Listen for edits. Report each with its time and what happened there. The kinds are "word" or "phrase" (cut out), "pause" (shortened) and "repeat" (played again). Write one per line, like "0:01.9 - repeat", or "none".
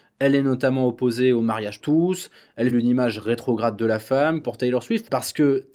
0:01.8 - word
0:02.7 - word
0:04.4 - phrase